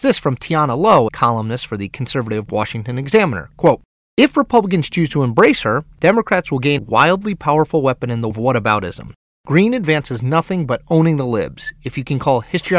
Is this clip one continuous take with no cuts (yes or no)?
no